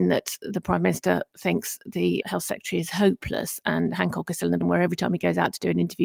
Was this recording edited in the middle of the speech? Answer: yes; 1 cut; at 4.6 s

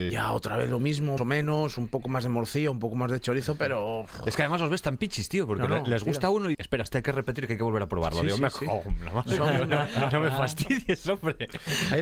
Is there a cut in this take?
yes; 3 cuts; at 1.2 s, 6.5 s, 6.9 s

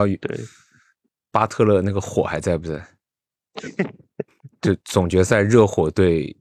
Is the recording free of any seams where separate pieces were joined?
yes; 0 cuts

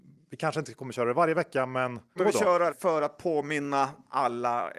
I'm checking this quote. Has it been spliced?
yes; 2 cuts; at 2.2 s, 2.7 s

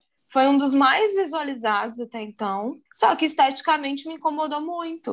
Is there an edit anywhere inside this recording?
yes; 1 cut; at 2.9 s

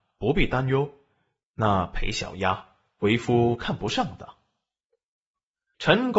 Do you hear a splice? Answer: no; 0 cuts

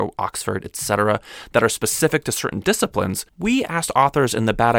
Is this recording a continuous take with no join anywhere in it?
no; 1 cut; at 3.3 s

